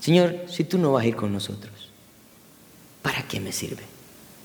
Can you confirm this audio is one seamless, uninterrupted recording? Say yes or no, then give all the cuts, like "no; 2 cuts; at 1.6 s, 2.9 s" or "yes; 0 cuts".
yes; 0 cuts